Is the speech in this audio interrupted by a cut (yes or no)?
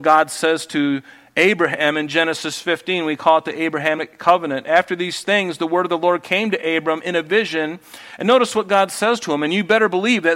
no